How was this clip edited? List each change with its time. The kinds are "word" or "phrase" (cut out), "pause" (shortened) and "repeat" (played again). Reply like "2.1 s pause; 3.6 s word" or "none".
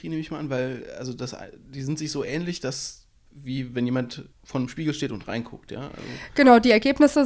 3.2 s pause; 4.3 s pause